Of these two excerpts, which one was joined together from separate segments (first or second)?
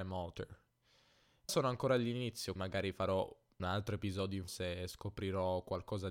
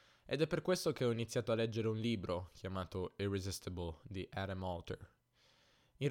first